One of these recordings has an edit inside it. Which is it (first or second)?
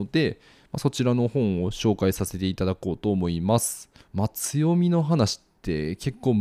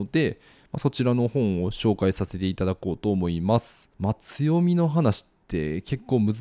second